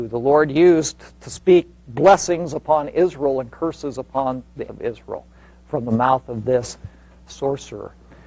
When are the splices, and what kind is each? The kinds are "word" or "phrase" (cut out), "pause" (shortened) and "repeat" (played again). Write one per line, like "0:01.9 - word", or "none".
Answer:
0:04.7 - word
0:07.3 - word

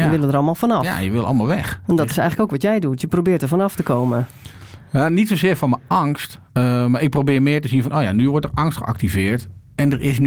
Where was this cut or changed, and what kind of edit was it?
0:06.5 - pause

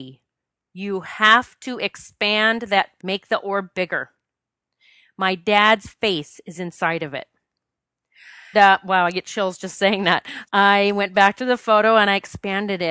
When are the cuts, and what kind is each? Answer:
0:03.0 - word
0:08.5 - word
0:10.4 - word

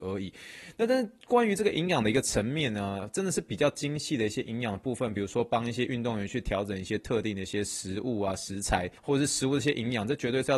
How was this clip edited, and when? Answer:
0:09.0 - pause

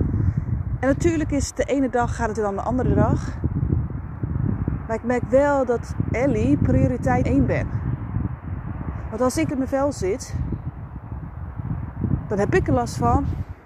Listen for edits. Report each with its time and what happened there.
0:02.4 - word
0:06.1 - word
0:07.2 - word
0:09.5 - phrase

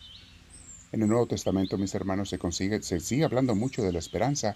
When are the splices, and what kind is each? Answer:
none

